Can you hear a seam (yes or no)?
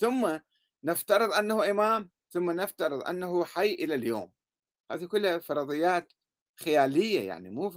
no